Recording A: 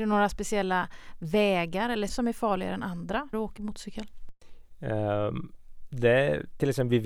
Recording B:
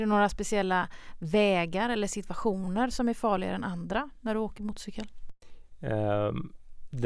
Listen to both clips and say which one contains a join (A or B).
A